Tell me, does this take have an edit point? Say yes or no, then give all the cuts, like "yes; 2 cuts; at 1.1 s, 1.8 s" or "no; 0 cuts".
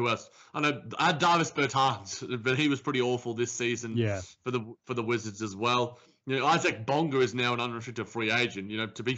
no; 0 cuts